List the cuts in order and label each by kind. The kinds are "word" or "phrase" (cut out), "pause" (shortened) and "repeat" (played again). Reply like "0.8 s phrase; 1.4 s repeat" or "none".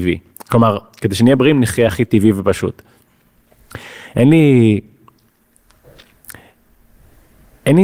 none